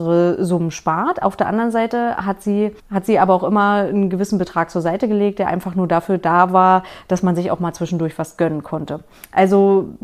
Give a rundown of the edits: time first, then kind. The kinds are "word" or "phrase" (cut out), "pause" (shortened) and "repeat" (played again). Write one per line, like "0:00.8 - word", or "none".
0:02.8 - pause